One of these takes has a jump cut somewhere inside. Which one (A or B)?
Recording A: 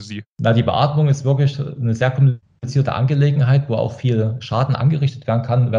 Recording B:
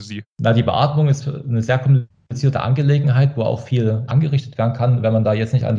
B